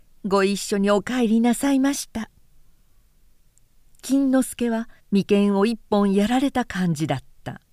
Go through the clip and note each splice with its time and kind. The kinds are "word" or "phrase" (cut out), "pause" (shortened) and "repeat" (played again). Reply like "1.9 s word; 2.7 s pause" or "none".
5.0 s pause